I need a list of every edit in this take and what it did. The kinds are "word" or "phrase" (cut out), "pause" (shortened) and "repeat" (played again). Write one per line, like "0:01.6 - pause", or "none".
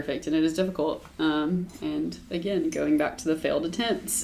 none